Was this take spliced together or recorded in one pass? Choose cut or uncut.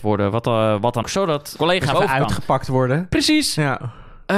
cut